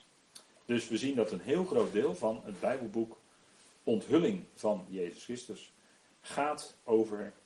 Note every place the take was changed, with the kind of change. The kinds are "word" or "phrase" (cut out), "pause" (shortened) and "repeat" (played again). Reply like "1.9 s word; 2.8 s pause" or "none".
none